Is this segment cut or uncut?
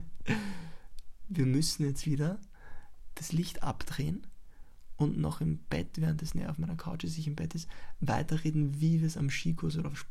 uncut